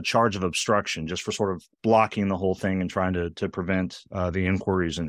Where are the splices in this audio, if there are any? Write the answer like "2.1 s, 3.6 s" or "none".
1.7 s